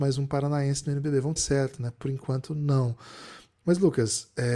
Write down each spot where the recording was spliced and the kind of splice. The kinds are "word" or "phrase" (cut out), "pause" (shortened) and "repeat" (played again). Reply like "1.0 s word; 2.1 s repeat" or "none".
1.4 s phrase